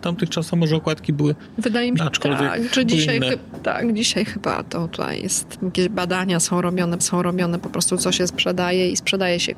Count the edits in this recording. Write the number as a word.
three